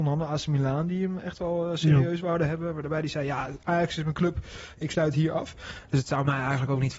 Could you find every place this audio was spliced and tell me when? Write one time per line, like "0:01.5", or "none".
none